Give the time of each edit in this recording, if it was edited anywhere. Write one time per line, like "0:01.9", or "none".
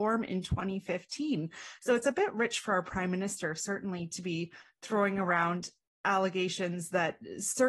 none

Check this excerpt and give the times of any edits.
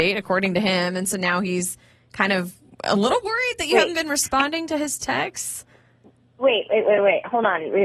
none

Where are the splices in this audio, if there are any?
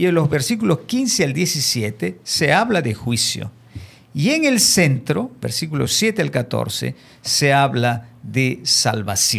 none

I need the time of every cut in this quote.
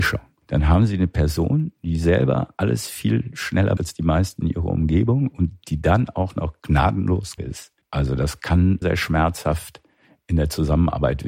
0:03.8
0:07.4
0:08.8

